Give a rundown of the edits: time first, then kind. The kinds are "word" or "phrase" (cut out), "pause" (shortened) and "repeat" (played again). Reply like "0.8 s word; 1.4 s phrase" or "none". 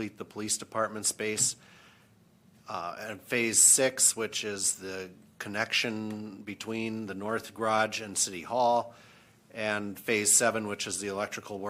none